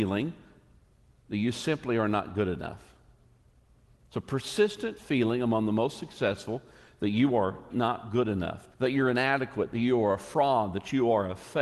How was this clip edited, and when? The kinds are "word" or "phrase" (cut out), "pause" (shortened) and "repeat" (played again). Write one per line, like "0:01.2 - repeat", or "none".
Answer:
0:07.7 - word
0:08.7 - pause